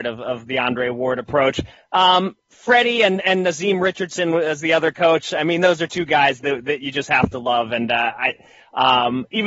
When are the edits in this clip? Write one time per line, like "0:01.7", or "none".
none